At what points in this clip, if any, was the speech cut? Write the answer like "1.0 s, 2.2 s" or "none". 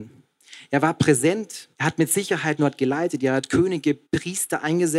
1.7 s, 2.6 s, 4.0 s